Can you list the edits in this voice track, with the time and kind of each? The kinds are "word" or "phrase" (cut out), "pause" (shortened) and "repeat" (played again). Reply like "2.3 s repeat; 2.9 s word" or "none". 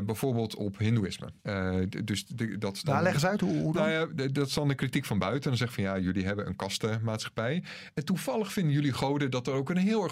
1.4 s pause